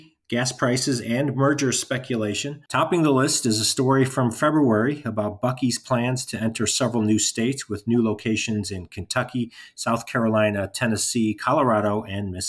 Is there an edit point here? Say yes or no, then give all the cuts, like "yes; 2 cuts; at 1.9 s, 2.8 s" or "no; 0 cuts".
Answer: yes; 1 cut; at 2.7 s